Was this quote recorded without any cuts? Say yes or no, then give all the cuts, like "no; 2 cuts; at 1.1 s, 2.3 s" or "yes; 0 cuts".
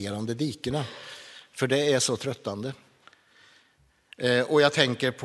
yes; 0 cuts